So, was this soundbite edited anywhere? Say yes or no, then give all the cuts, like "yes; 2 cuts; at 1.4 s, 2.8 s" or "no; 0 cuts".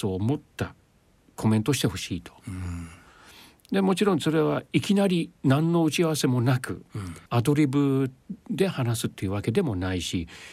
yes; 2 cuts; at 5.4 s, 7.3 s